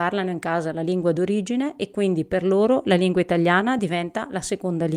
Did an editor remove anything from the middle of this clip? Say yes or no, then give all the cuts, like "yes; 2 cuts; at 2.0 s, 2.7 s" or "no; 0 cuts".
no; 0 cuts